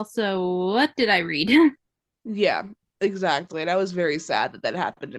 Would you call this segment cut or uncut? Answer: cut